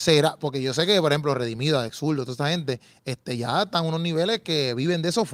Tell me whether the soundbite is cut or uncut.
uncut